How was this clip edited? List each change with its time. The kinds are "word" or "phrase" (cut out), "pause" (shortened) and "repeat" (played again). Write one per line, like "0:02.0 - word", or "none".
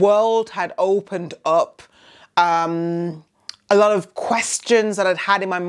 none